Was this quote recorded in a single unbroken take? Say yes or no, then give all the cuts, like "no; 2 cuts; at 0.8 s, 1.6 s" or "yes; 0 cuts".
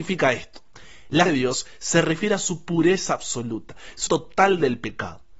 no; 2 cuts; at 1.3 s, 4.1 s